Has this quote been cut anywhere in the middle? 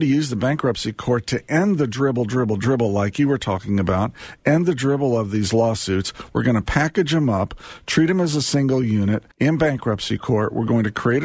yes; 1 cut; at 9.3 s

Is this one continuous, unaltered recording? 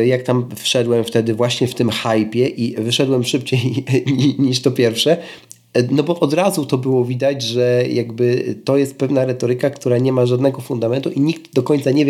yes; 0 cuts

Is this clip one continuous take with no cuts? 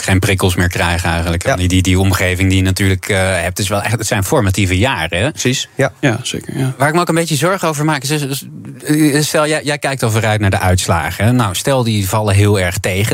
yes; 0 cuts

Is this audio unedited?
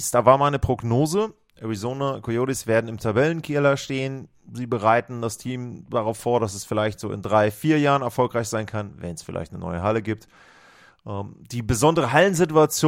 yes; 0 cuts

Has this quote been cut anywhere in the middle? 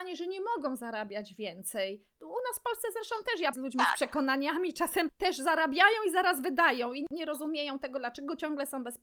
yes; 1 cut; at 3.5 s

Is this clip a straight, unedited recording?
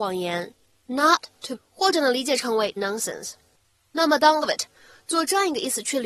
no; 3 cuts; at 1.5 s, 2.8 s, 4.4 s

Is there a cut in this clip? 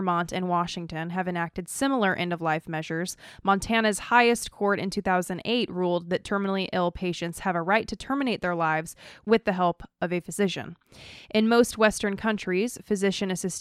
no; 0 cuts

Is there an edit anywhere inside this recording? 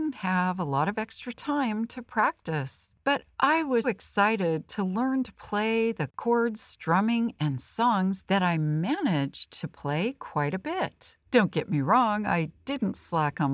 yes; 2 cuts; at 3.8 s, 11.3 s

